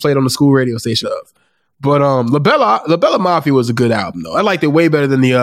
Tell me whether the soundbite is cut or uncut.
cut